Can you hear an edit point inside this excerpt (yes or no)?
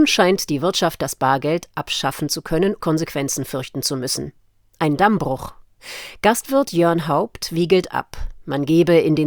yes